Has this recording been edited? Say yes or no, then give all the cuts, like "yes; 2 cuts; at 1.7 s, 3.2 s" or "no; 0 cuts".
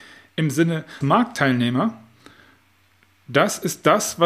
yes; 1 cut; at 1.0 s